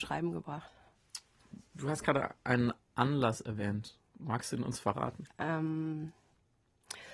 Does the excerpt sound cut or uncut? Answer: cut